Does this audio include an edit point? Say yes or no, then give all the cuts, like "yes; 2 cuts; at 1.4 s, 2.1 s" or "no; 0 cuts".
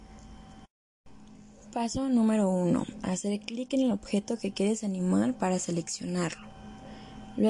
no; 0 cuts